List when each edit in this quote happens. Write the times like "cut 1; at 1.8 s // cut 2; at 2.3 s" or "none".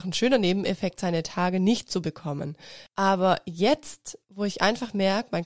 cut 1; at 2.9 s